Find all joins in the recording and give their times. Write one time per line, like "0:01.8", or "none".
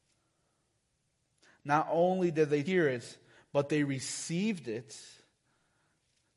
0:02.6